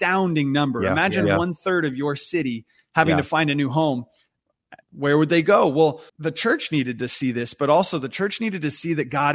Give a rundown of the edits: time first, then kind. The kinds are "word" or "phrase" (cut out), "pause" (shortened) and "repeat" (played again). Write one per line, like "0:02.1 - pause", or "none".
0:04.8 - pause
0:06.1 - pause